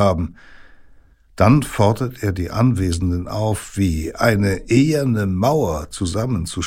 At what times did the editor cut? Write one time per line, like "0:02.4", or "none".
none